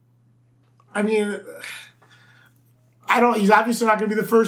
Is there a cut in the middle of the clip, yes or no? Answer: no